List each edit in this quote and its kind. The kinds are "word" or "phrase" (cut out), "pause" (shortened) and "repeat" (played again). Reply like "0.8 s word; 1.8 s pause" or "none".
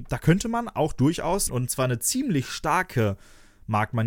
1.5 s phrase